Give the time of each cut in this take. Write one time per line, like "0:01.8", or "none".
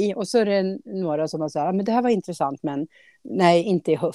none